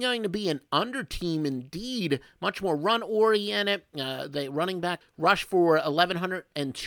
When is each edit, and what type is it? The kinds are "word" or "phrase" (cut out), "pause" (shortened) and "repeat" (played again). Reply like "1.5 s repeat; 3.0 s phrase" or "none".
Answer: 5.0 s phrase